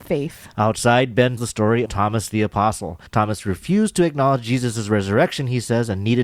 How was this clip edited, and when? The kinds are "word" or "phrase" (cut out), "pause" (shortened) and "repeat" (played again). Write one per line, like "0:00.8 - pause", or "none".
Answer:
0:01.4 - word
0:01.9 - word
0:03.1 - pause